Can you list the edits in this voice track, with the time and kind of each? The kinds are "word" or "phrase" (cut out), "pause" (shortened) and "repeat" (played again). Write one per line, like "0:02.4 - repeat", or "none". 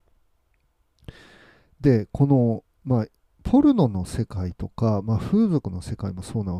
none